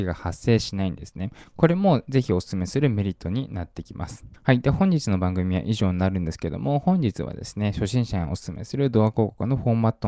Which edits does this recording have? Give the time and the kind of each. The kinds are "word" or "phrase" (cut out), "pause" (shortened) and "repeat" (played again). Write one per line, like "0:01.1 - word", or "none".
0:04.4 - pause